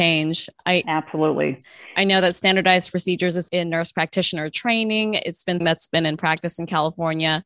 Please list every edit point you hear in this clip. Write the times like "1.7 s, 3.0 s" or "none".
3.5 s, 5.6 s